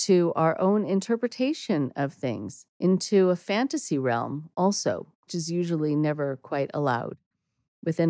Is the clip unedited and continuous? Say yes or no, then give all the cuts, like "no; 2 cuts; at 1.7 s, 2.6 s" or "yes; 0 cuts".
no; 2 cuts; at 2.7 s, 5.3 s